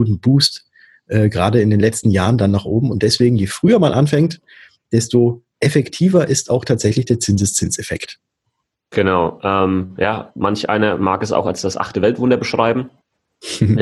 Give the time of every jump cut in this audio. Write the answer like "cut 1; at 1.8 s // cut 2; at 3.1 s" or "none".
none